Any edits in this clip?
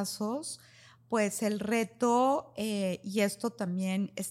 no; 0 cuts

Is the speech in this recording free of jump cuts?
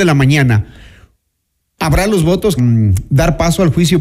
no; 1 cut; at 2.6 s

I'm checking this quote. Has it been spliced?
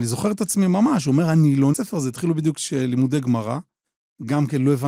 yes; 1 cut; at 1.7 s

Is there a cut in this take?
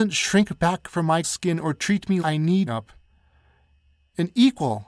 yes; 3 cuts; at 1.2 s, 2.2 s, 2.7 s

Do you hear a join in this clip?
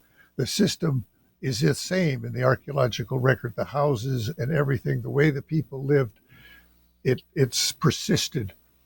no; 0 cuts

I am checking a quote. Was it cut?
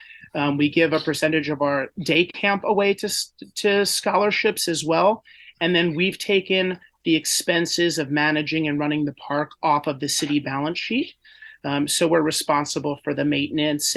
no; 0 cuts

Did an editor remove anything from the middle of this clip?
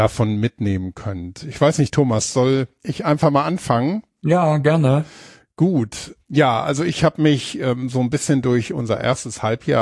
yes; 1 cut; at 6.2 s

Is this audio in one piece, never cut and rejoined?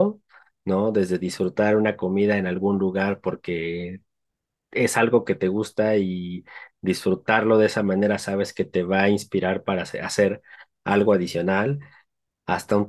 yes; 0 cuts

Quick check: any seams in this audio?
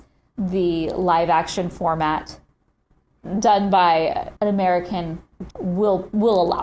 yes; 2 cuts; at 4.4 s, 5.5 s

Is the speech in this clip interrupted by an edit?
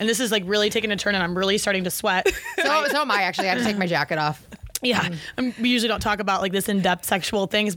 no; 0 cuts

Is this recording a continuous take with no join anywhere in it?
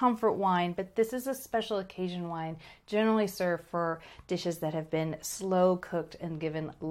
yes; 0 cuts

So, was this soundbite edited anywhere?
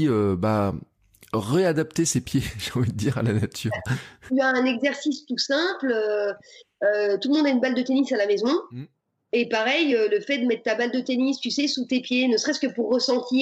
no; 0 cuts

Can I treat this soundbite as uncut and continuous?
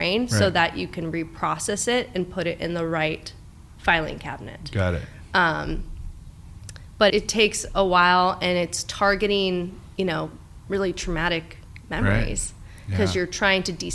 no; 1 cut; at 7.1 s

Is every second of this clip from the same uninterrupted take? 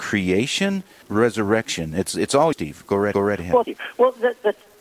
no; 4 cuts; at 1.0 s, 2.5 s, 3.1 s, 3.6 s

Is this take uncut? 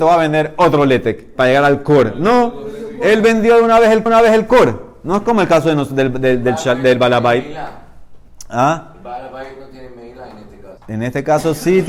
no; 2 cuts; at 4.1 s, 10.8 s

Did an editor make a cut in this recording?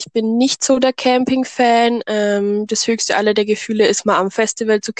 no; 0 cuts

